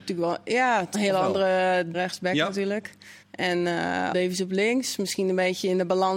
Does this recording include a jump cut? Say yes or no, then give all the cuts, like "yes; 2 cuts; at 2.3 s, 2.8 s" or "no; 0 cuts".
yes; 4 cuts; at 0.9 s, 1.9 s, 3.2 s, 4.1 s